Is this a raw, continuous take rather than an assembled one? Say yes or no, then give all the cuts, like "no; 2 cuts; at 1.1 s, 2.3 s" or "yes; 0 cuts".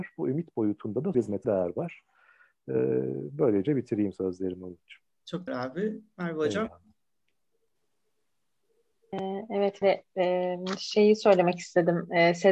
no; 4 cuts; at 1.1 s, 1.4 s, 5.5 s, 9.8 s